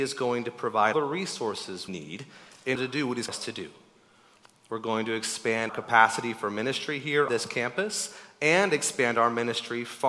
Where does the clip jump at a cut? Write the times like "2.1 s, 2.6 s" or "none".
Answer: 0.9 s, 1.9 s, 2.8 s, 3.3 s, 5.7 s, 7.3 s